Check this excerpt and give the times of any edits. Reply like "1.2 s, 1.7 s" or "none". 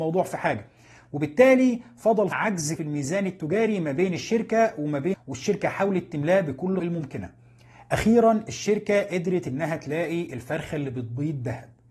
2.3 s, 2.8 s, 5.1 s, 6.8 s